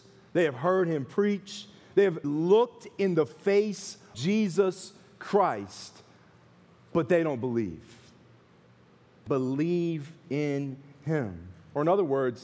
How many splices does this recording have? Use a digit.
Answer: 3